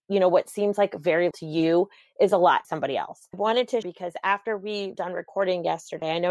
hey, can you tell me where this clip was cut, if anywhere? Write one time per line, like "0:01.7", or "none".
0:01.3
0:02.6
0:03.3
0:03.8
0:04.9